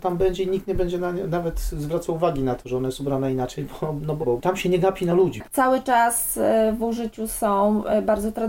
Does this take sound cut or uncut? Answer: cut